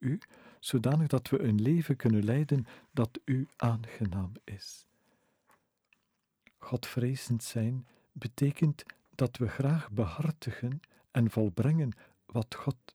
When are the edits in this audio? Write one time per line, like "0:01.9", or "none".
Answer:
none